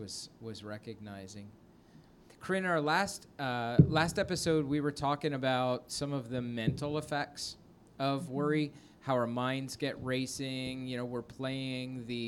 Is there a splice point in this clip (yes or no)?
no